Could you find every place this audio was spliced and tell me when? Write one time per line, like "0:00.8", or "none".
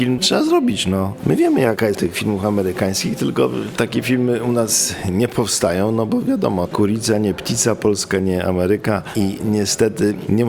0:01.9

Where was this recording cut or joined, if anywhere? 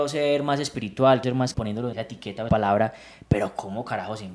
0:01.2
0:01.5
0:01.9
0:02.5

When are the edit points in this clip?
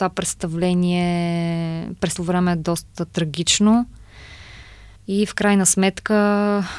0:02.1
0:05.0

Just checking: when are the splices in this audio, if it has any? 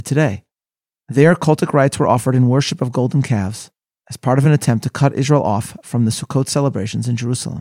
none

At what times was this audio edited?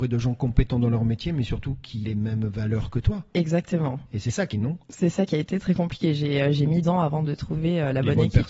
0:02.0
0:04.5
0:06.8

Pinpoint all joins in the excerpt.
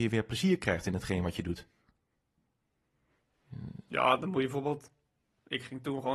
none

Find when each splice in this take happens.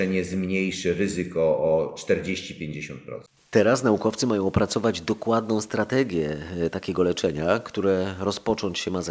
0:03.3

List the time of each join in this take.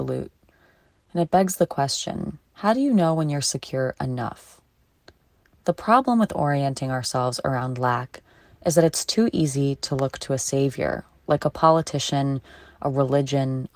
0:02.5

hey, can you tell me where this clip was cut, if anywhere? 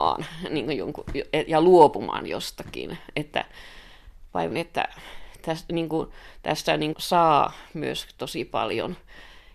0:04.5
0:06.9

